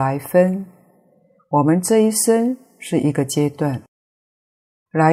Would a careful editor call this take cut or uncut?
uncut